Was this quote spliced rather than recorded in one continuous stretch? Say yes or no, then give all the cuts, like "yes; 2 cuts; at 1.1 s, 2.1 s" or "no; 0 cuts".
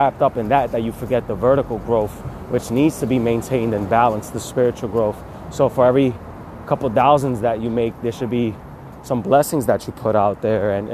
no; 0 cuts